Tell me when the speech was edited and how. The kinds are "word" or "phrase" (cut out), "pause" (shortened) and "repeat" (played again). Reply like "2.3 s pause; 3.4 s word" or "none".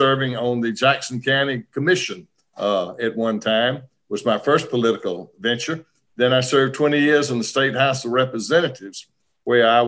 none